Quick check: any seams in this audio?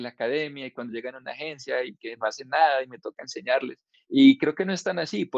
no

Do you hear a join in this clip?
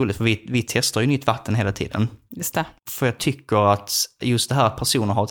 yes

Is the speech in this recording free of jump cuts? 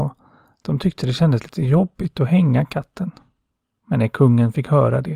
yes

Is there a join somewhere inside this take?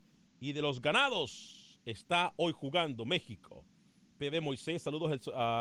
no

